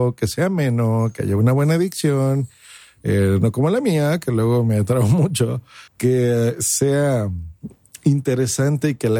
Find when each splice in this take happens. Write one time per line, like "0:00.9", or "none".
0:05.9